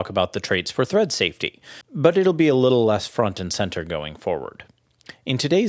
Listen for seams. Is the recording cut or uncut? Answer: uncut